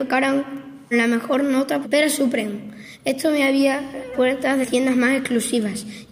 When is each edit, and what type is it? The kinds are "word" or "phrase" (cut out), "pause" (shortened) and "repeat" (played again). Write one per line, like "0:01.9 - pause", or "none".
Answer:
0:00.9 - word
0:01.8 - word
0:04.1 - word
0:04.6 - word